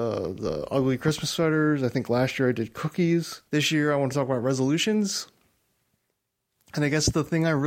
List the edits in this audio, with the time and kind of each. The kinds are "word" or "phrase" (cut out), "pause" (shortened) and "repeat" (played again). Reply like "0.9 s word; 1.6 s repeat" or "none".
3.5 s pause